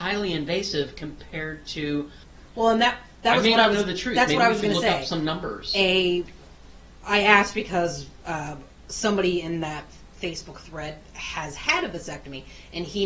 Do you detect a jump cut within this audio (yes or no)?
no